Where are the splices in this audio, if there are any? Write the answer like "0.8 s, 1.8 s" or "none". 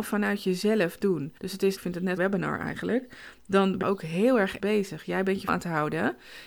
1.4 s, 1.8 s, 2.2 s, 3.8 s, 4.6 s, 5.5 s